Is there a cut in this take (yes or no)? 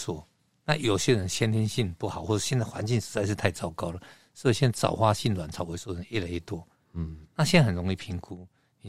no